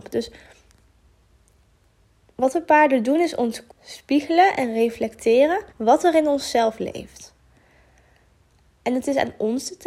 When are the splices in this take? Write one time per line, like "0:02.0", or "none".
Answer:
0:03.7
0:05.7